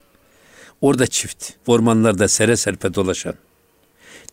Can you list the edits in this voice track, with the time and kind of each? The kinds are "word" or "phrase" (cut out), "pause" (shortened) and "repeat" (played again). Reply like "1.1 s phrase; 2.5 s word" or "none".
1.1 s word; 1.6 s pause